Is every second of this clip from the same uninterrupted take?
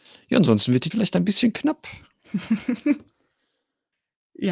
no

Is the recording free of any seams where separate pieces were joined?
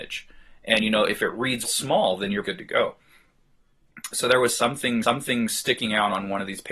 no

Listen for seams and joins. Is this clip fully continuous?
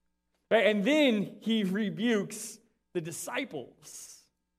yes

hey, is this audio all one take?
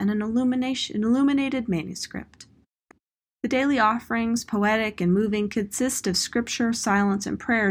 yes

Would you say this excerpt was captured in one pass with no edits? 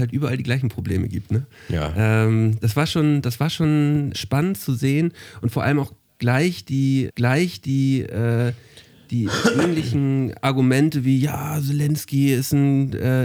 no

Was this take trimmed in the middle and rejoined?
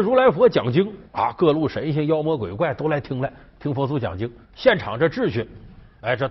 yes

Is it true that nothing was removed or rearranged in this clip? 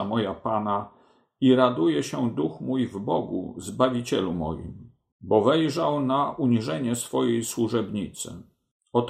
yes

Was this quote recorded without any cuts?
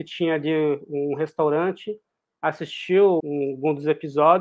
no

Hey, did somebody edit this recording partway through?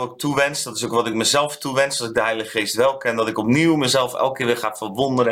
no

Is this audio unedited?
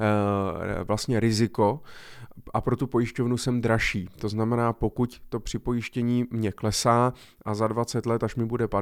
yes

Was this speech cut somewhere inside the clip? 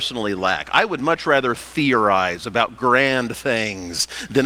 no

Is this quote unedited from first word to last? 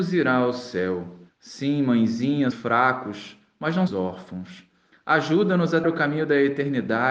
no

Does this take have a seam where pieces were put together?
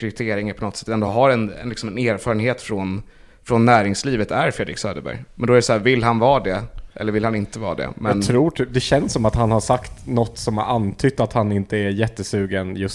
no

